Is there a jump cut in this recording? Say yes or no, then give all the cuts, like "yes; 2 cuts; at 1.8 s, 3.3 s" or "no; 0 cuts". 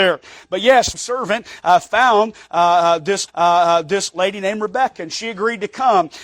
yes; 2 cuts; at 0.9 s, 3.3 s